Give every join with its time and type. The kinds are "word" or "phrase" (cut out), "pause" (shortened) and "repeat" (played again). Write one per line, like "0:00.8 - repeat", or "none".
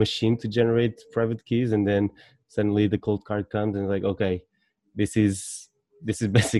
none